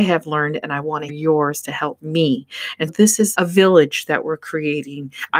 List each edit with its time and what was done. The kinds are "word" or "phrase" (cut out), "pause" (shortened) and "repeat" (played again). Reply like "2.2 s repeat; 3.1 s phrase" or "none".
1.1 s word; 2.9 s word; 3.3 s word

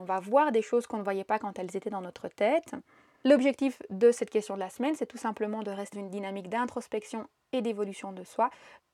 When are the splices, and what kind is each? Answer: 5.9 s word

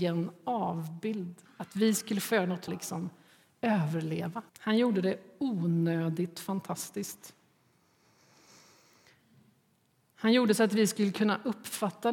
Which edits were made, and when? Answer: 1.4 s pause; 2.7 s phrase; 4.5 s pause

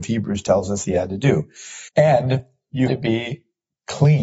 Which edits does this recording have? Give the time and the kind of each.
1.9 s pause; 2.9 s word

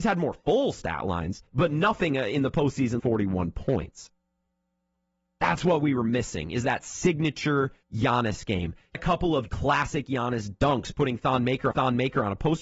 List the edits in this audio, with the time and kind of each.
1.5 s pause; 3.0 s word; 7.8 s pause; 8.9 s word; 9.5 s word; 11.7 s repeat

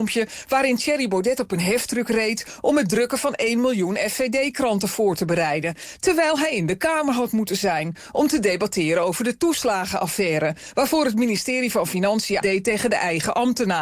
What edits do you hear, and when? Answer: 12.4 s word

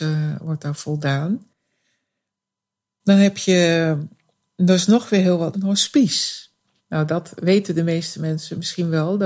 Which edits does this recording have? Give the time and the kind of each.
5.5 s word

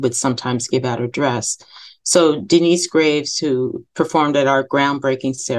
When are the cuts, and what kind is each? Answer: 3.9 s pause

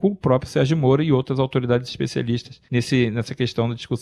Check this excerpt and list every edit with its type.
2.7 s pause

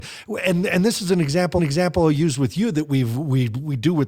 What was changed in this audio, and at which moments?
1.6 s repeat

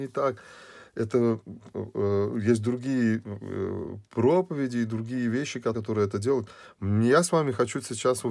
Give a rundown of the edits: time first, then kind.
5.7 s word

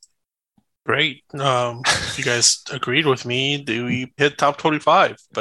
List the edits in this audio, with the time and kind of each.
4.2 s word

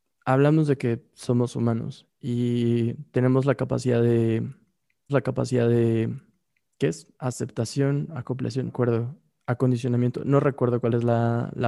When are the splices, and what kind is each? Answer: 5.1 s repeat; 7.1 s pause; 8.7 s phrase

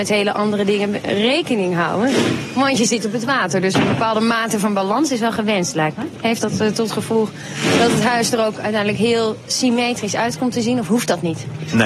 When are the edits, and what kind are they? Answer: none

